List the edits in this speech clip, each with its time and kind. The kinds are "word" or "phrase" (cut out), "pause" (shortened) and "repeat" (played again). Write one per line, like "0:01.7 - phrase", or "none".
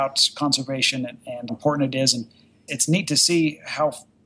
0:01.5 - word
0:02.7 - word